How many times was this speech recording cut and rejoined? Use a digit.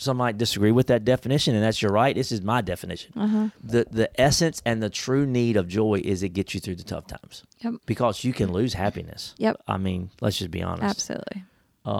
2